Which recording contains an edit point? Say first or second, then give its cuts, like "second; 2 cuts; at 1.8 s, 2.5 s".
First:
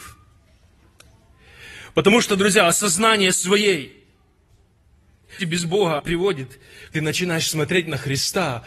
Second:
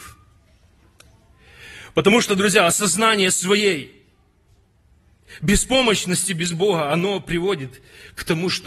first; 3 cuts; at 5.4 s, 6.0 s, 6.9 s